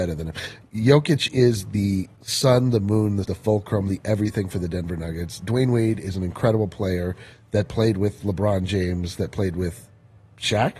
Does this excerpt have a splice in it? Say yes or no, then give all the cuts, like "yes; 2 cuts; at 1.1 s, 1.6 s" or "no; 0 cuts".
yes; 2 cuts; at 2.2 s, 3.2 s